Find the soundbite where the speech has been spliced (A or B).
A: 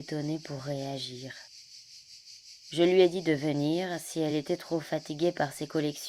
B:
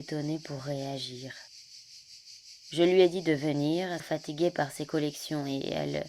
B